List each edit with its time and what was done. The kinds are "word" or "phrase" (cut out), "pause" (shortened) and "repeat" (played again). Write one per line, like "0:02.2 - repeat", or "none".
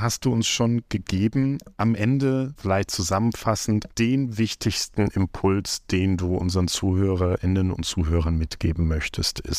none